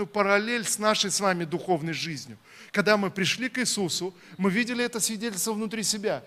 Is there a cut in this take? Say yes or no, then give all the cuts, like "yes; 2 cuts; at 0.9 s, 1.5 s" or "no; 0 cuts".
no; 0 cuts